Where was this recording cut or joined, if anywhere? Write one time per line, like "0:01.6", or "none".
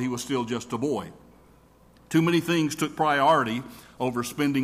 none

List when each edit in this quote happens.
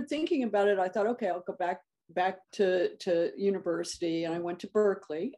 0:02.4

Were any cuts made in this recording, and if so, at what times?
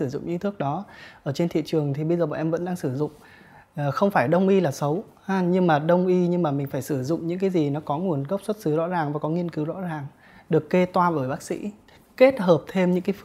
none

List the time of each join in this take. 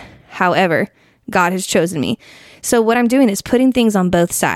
none

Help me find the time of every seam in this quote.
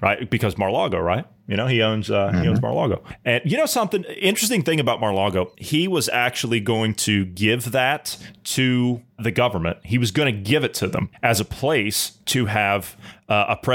none

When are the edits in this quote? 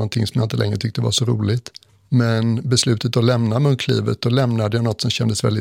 0:01.9

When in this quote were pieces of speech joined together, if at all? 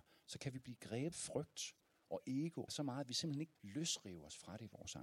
0:01.1
0:02.7
0:03.6

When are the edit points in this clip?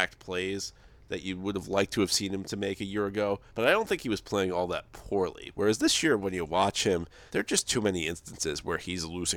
0:03.5
0:07.3

